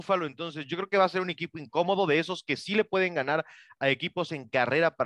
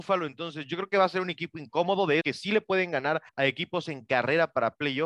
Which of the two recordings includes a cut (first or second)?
second